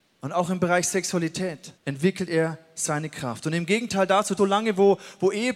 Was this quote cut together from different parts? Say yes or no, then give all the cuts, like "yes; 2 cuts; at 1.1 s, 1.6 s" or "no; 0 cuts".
yes; 2 cuts; at 1.8 s, 4.4 s